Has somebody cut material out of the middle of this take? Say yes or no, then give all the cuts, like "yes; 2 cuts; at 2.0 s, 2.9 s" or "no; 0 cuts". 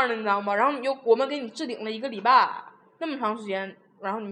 no; 0 cuts